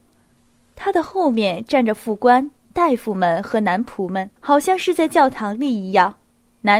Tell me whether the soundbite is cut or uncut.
cut